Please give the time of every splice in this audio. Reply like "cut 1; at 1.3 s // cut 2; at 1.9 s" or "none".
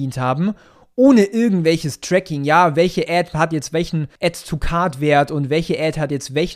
cut 1; at 4.2 s